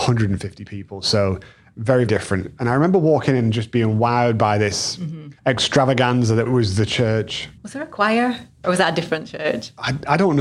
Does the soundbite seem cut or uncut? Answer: cut